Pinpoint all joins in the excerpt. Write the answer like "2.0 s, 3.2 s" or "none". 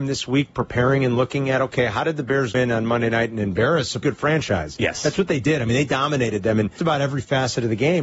2.5 s, 4.0 s, 6.8 s